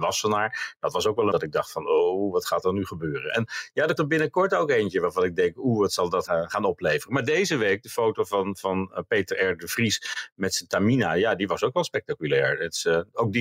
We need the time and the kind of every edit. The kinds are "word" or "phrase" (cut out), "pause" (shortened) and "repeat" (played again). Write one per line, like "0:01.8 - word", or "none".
0:01.3 - phrase
0:04.0 - word
0:06.3 - word